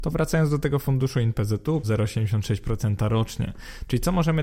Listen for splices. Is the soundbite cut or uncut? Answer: cut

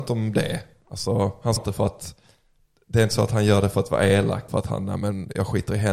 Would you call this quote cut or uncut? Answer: cut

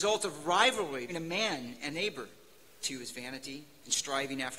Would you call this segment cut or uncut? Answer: cut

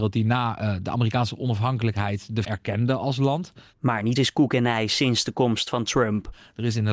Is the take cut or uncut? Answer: cut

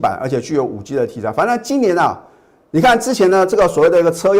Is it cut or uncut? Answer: uncut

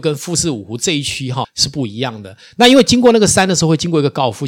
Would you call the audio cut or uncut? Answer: cut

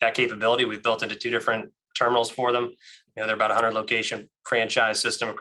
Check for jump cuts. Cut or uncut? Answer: uncut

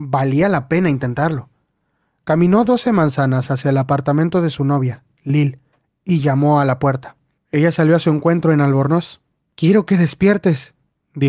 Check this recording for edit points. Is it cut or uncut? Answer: uncut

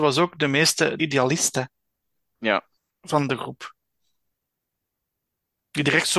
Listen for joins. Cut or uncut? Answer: cut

